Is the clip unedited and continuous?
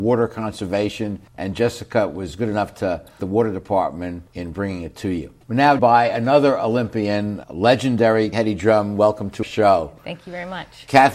no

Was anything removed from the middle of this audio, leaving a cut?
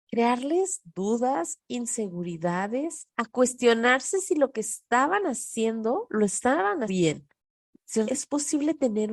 yes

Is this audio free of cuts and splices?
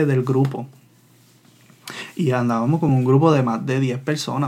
yes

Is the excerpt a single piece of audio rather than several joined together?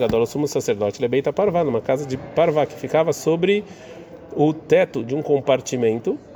yes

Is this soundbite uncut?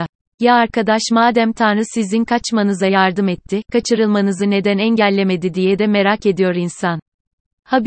yes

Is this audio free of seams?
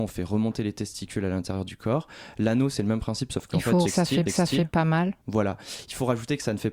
no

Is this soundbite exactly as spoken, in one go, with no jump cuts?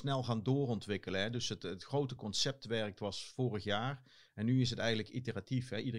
yes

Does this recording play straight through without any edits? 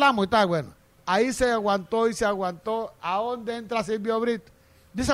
yes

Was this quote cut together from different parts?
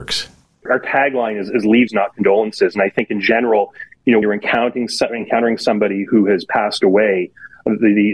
yes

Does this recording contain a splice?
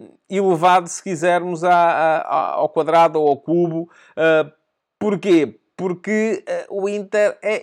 no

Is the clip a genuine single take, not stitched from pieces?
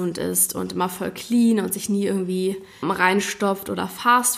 no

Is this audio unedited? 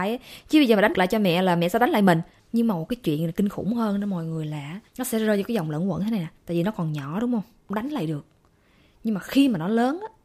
no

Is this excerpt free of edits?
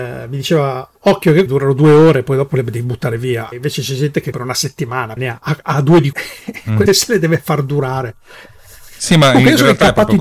no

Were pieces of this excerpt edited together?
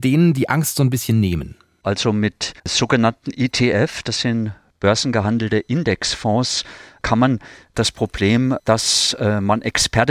yes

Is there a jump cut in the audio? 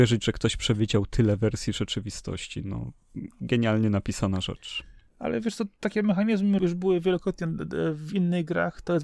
yes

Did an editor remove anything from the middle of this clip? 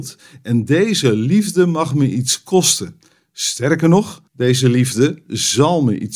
yes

